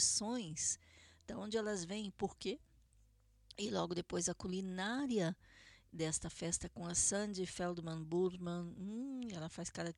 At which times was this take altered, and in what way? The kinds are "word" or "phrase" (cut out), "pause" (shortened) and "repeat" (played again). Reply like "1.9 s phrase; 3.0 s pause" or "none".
none